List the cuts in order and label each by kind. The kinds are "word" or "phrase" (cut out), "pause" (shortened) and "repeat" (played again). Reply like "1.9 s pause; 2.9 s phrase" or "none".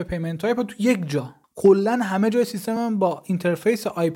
none